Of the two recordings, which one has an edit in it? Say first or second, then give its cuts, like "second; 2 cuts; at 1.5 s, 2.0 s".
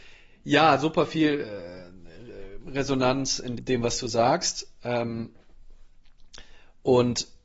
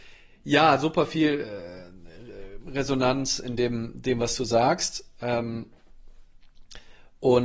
first; 1 cut; at 3.6 s